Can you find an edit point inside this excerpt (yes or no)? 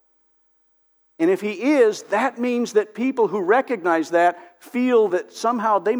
no